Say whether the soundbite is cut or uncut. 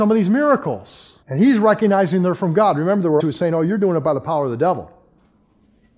cut